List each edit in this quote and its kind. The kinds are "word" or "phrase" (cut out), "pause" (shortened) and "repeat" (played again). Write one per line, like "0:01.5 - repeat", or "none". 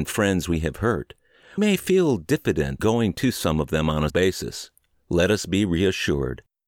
0:01.6 - word
0:02.8 - word
0:04.1 - word
0:04.9 - pause